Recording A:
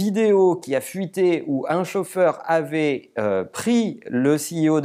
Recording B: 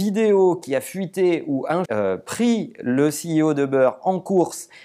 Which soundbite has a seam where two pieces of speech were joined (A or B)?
B